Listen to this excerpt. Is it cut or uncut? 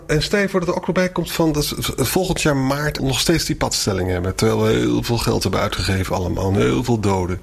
cut